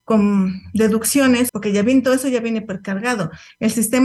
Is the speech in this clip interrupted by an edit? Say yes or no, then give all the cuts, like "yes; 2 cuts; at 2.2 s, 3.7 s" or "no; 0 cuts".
yes; 1 cut; at 1.5 s